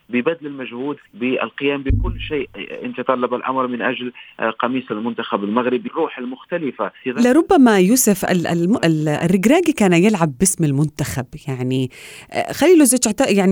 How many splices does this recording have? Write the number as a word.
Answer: three